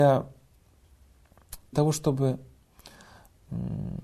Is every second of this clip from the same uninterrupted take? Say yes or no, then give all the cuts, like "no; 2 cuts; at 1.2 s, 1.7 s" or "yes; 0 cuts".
no; 1 cut; at 1.7 s